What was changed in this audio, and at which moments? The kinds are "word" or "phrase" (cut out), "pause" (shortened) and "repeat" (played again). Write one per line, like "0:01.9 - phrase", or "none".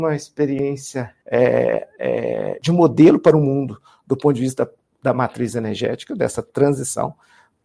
0:01.2 - pause

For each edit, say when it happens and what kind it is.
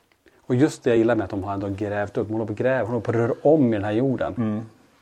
none

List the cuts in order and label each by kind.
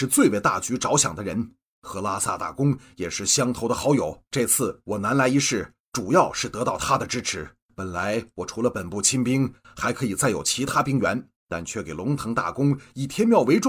0:04.3 - pause
0:07.6 - pause
0:11.4 - pause

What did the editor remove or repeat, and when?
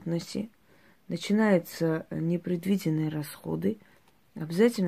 none

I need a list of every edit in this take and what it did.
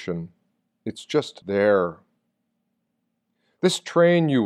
0:01.4 - word

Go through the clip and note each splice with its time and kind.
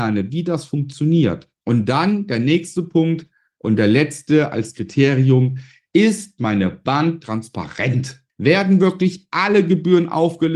none

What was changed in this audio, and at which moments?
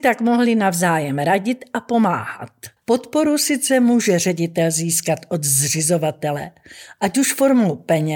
0:02.8 - pause

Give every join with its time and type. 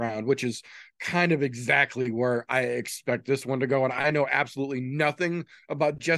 none

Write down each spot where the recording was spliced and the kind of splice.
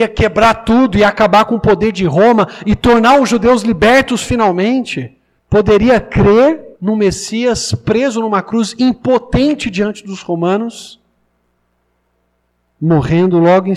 0:05.4 - pause
0:06.7 - pause

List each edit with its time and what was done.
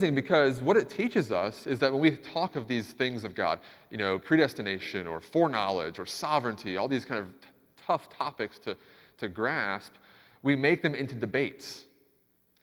none

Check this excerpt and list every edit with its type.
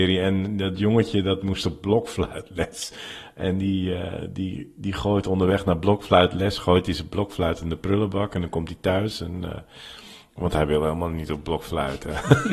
none

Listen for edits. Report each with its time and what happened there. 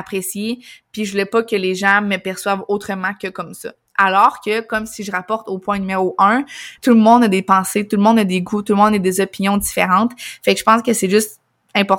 0:06.8 - pause

